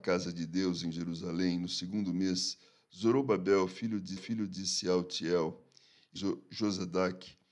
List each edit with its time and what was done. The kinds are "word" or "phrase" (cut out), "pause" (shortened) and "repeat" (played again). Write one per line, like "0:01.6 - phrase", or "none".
0:04.2 - repeat
0:06.2 - phrase